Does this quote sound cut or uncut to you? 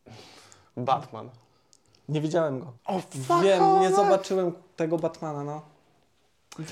cut